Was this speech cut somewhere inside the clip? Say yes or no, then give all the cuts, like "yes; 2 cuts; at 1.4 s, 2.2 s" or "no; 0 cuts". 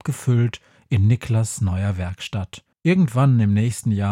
yes; 1 cut; at 2.7 s